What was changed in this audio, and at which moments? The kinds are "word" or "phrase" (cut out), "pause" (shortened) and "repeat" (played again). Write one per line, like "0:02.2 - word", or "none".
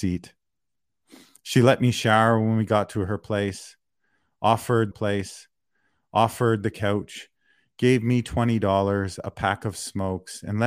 0:04.9 - repeat